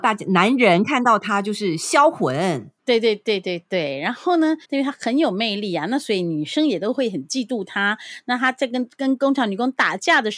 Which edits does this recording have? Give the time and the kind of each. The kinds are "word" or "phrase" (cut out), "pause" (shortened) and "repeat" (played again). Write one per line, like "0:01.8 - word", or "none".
0:02.8 - pause
0:04.6 - pause